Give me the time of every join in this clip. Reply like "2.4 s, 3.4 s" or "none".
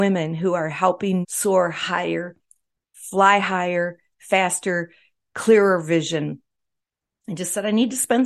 1.2 s